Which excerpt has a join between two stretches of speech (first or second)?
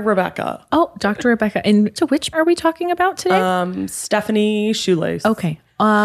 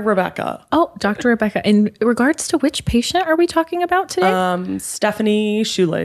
first